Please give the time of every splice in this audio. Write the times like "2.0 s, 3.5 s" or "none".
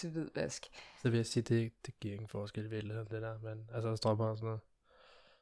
none